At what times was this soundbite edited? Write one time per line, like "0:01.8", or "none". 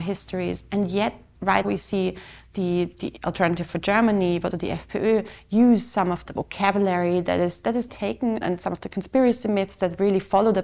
0:01.6
0:04.5
0:06.3
0:07.9
0:08.4